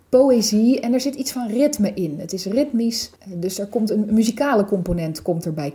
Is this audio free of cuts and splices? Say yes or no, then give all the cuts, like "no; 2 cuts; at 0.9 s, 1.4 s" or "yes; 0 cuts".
no; 1 cut; at 3.2 s